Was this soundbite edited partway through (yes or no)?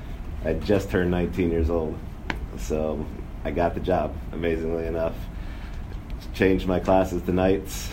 no